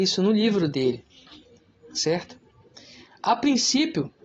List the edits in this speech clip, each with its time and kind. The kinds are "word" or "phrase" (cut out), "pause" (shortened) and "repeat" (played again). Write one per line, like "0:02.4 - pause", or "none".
none